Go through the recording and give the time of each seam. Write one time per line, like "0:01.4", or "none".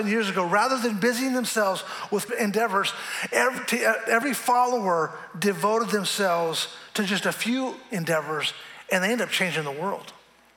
0:02.3